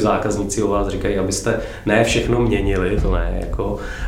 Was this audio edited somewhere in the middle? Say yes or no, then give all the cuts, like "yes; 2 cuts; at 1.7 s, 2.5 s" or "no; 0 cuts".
no; 0 cuts